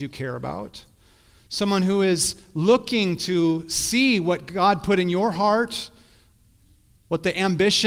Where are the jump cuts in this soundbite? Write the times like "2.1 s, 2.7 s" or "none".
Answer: none